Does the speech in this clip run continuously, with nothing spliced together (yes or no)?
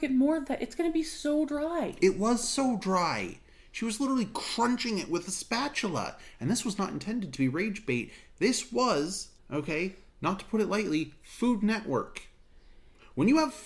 no